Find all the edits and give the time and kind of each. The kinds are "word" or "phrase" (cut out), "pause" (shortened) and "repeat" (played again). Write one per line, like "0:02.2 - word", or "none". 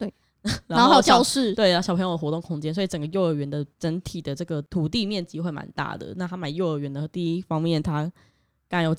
0:03.7 - pause